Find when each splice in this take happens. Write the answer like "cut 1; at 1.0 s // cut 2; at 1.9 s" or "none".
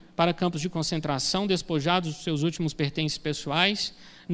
none